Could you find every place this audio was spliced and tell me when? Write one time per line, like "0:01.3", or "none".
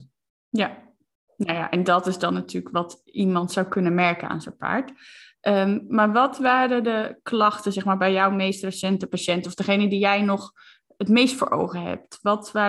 none